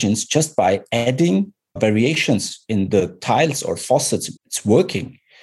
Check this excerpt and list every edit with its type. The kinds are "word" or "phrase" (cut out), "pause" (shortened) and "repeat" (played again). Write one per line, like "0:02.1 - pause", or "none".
0:01.8 - word
0:04.4 - pause